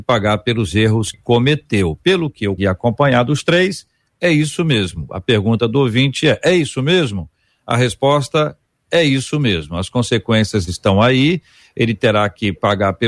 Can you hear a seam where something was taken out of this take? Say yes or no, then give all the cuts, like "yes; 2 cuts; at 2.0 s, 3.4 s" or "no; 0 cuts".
yes; 2 cuts; at 1.1 s, 2.6 s